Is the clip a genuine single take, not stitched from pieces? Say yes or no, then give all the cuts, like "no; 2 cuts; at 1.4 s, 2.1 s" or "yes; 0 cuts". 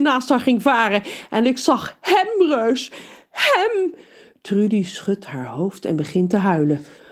yes; 0 cuts